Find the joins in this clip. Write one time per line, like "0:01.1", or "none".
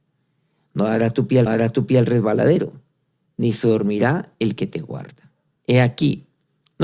0:01.5
0:05.6